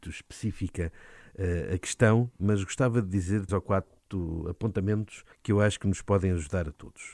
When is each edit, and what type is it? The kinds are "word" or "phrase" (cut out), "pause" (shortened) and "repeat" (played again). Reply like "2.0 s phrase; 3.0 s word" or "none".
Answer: 3.5 s word; 5.3 s pause

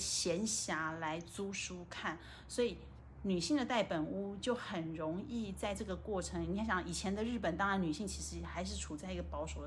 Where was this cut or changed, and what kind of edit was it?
none

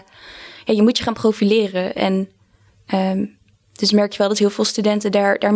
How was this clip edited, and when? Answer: none

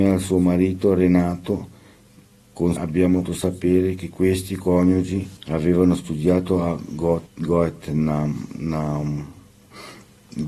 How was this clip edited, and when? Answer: 2.8 s word; 3.3 s word; 5.4 s pause; 7.3 s pause

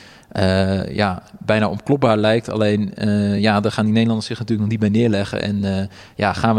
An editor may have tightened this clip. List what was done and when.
none

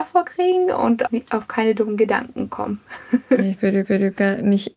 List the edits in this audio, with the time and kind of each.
1.1 s word; 3.8 s repeat

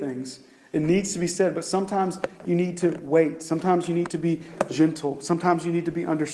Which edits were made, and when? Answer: none

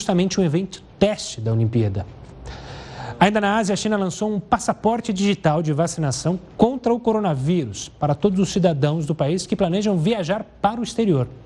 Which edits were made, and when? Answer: none

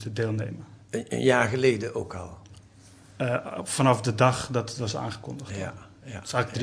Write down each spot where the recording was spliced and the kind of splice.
none

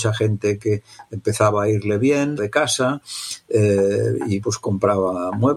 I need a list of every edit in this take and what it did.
2.4 s phrase; 4.4 s word

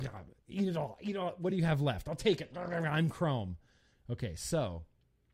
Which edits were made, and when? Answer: none

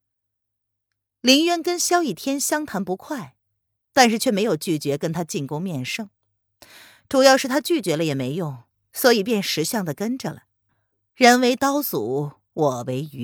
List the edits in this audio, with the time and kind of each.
none

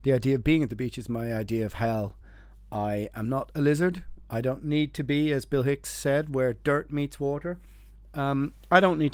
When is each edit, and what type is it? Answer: none

